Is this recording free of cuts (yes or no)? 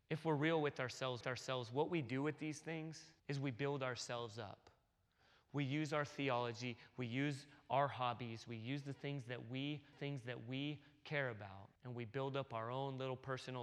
no